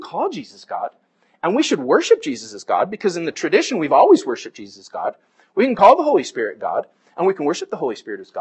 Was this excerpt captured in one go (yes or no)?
yes